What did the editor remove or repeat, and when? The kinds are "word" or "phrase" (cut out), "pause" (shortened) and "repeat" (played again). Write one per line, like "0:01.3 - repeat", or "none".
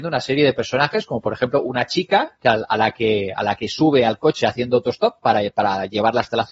none